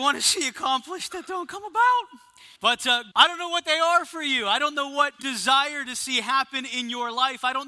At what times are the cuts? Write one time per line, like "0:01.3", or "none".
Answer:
0:02.6
0:03.1
0:05.2